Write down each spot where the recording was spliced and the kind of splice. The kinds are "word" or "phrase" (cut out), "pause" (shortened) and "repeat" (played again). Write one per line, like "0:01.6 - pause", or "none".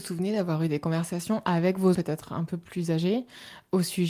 0:01.9 - word